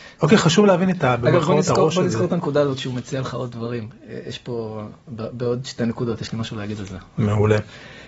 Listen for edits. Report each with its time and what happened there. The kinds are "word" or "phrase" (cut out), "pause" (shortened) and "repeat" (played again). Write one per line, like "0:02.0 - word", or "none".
none